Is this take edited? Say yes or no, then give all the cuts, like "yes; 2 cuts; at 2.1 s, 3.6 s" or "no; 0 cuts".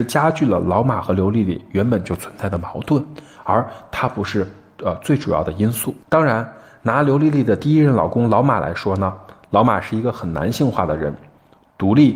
yes; 1 cut; at 6.0 s